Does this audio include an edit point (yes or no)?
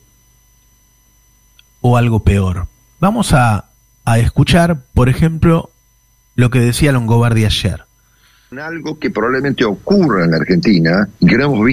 no